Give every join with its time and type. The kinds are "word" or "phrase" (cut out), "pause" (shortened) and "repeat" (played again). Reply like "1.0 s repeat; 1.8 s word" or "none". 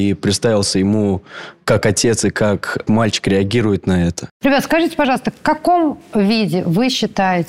2.9 s word